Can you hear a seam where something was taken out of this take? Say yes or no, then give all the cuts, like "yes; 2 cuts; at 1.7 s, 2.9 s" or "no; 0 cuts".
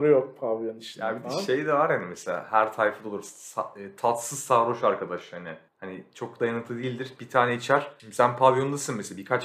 no; 0 cuts